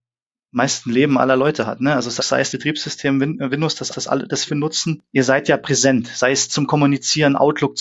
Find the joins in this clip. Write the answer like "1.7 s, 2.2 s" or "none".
2.2 s, 2.5 s, 3.9 s, 4.5 s, 6.5 s